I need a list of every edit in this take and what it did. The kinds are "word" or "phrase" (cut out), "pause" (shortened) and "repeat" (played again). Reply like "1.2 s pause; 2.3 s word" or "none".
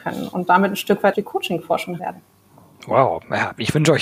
1.1 s word; 2.0 s word